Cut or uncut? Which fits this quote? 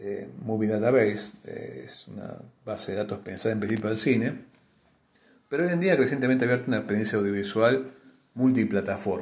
uncut